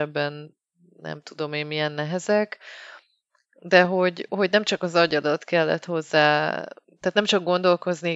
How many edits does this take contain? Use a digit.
0